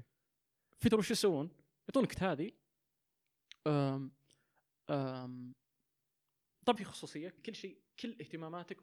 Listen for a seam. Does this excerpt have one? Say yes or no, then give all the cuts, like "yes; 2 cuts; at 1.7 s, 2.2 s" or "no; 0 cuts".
yes; 4 cuts; at 0.9 s, 2.2 s, 6.8 s, 7.4 s